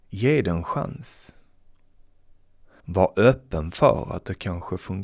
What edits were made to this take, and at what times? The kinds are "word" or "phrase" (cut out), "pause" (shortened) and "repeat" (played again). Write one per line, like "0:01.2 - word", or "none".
none